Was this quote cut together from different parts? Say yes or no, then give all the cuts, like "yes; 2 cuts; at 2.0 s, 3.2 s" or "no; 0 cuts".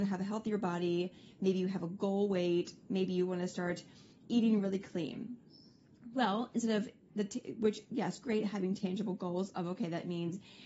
no; 0 cuts